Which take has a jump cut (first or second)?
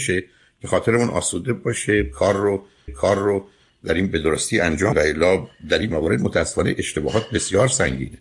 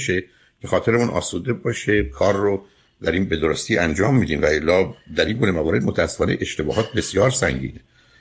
first